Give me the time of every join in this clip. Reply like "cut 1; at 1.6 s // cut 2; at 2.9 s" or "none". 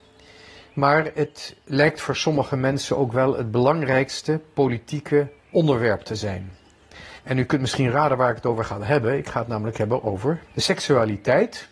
cut 1; at 5.4 s // cut 2; at 7.2 s // cut 3; at 10.5 s

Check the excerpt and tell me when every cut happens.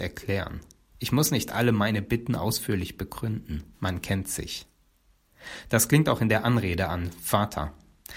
cut 1; at 3.7 s

